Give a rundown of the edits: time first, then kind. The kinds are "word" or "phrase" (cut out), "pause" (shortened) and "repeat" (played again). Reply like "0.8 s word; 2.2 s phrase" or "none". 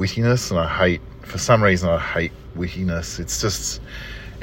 none